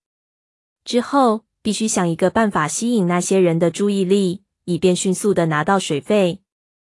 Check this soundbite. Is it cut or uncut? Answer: uncut